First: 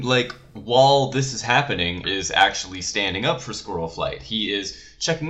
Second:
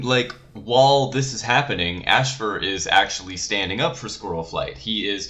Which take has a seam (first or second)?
first